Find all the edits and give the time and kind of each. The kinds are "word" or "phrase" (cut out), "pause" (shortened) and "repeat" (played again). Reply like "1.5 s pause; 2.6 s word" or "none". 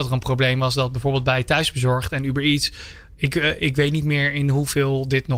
none